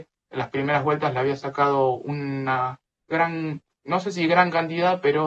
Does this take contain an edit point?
no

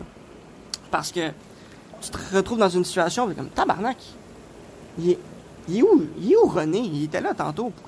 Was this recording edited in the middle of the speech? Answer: yes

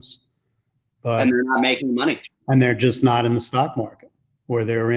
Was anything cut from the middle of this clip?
no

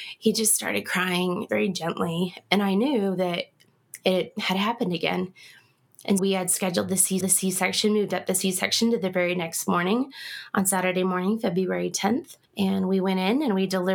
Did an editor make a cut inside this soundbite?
yes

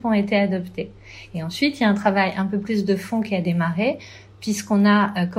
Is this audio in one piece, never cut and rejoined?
yes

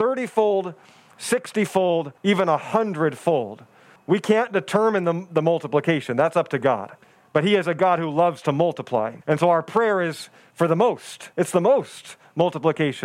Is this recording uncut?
no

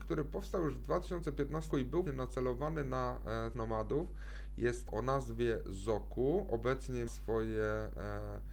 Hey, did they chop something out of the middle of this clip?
yes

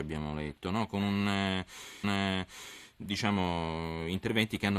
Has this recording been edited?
yes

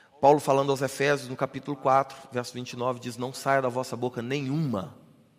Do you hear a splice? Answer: no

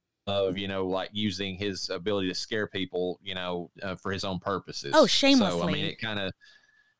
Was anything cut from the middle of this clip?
yes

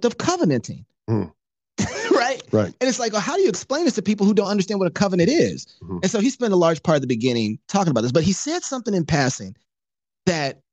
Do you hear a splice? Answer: no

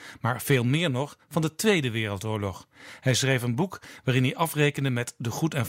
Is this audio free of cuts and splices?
yes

